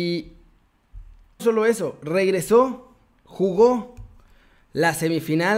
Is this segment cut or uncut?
cut